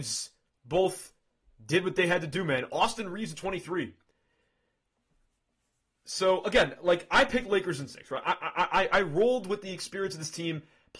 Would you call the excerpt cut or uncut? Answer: uncut